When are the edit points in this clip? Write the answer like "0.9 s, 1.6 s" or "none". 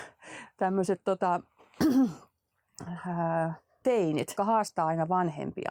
3.8 s, 4.4 s